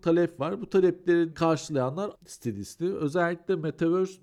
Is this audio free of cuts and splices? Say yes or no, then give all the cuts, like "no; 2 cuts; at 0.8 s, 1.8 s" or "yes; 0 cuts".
no; 2 cuts; at 1.3 s, 2.1 s